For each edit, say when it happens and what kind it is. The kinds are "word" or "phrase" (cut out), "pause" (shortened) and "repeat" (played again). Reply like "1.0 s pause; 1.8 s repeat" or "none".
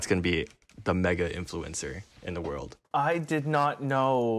2.1 s pause; 2.8 s pause